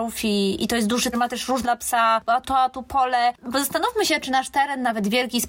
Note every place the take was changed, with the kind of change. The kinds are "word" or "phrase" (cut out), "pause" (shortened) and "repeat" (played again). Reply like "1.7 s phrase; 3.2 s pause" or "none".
1.1 s phrase; 1.6 s phrase; 2.4 s phrase